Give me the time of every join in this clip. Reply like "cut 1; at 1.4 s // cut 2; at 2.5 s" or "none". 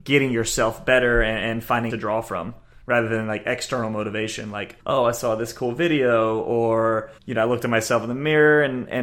cut 1; at 1.9 s // cut 2; at 4.8 s // cut 3; at 7.2 s